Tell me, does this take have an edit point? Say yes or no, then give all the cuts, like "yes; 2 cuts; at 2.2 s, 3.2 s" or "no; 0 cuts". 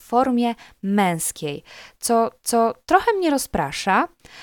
yes; 1 cut; at 2.4 s